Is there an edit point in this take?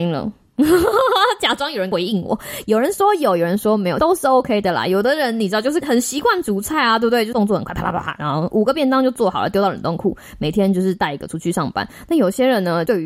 no; 0 cuts

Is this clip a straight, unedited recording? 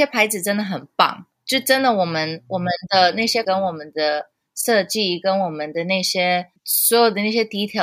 no; 2 cuts; at 3.4 s, 6.6 s

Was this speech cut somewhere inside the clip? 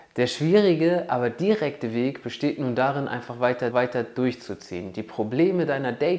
yes; 1 cut; at 3.7 s

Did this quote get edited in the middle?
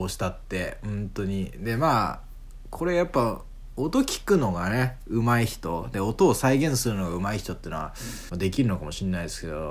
yes; 1 cut; at 8.3 s

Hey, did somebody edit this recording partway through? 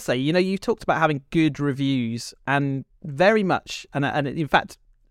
no; 0 cuts

